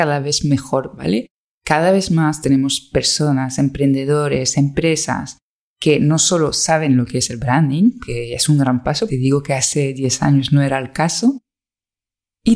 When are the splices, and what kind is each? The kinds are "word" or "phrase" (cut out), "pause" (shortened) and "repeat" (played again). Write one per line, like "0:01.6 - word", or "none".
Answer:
0:01.0 - word
0:09.1 - word

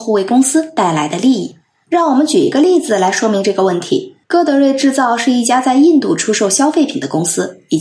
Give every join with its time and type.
0:04.2 - pause

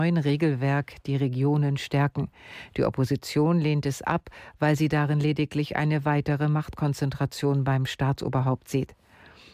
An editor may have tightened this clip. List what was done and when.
none

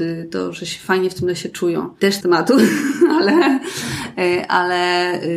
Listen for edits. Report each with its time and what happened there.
0:02.2 - phrase

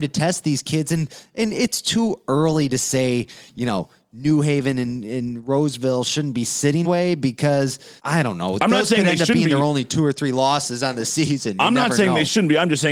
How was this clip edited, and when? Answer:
0:06.8 - word
0:08.0 - pause

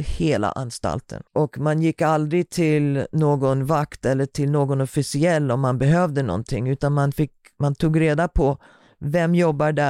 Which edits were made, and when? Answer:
0:01.3 - pause

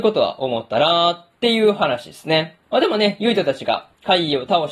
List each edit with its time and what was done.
0:02.6 - pause

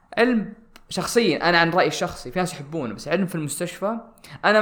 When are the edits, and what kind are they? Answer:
none

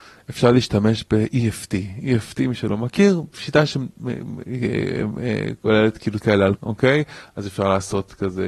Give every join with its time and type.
0:06.2 - word
0:06.6 - phrase

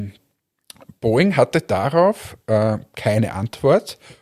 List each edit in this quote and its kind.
none

